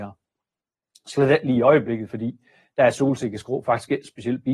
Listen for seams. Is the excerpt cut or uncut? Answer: uncut